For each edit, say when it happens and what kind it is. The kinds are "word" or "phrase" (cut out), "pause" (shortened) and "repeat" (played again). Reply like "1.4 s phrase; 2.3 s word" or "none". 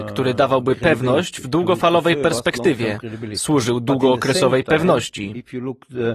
none